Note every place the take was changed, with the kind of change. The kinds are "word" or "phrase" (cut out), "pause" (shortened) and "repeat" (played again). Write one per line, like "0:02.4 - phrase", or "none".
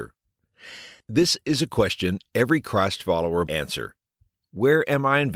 0:03.5 - word